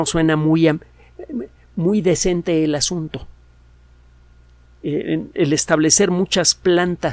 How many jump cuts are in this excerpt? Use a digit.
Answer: 0